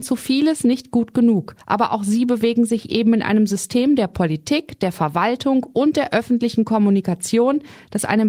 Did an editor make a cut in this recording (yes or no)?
yes